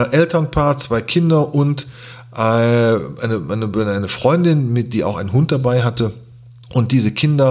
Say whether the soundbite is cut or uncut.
uncut